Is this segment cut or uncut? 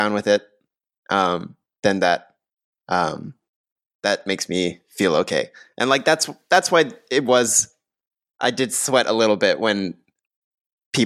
uncut